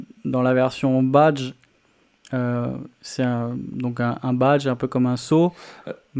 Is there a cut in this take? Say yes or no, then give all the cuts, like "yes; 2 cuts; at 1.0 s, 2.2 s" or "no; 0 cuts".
no; 0 cuts